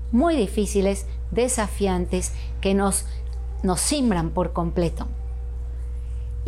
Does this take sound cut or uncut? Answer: uncut